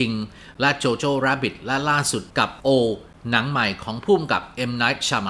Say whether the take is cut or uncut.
uncut